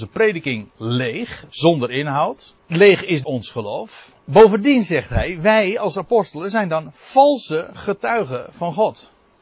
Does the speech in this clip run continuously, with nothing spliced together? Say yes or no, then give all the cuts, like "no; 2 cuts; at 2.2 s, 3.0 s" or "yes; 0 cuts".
no; 3 cuts; at 2.6 s, 3.2 s, 4.2 s